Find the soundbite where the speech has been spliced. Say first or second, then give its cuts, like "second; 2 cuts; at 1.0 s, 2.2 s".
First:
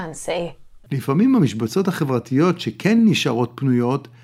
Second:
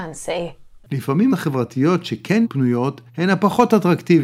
second; 3 cuts; at 1.3 s, 2.4 s, 3.1 s